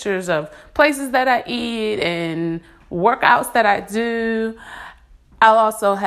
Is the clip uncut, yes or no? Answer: yes